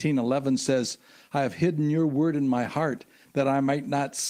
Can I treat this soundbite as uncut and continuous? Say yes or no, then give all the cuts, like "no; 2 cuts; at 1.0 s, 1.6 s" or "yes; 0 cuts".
yes; 0 cuts